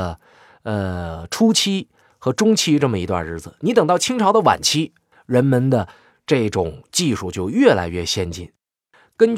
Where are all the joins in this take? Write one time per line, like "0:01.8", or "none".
0:05.1

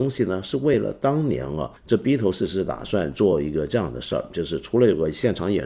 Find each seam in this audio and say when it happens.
0:01.8

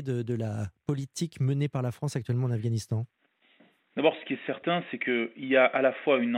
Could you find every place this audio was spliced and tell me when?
none

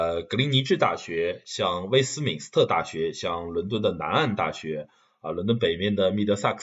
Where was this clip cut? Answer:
none

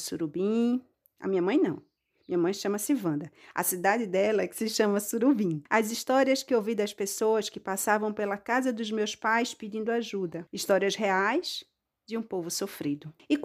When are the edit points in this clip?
none

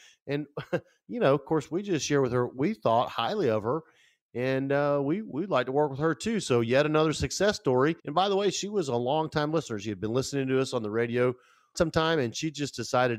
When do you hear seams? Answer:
0:08.0
0:11.7

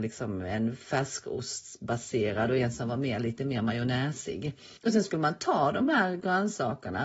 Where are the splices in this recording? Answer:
0:04.8

